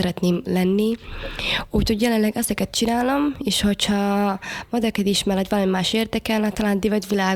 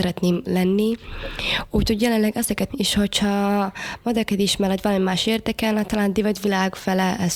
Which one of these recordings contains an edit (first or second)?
second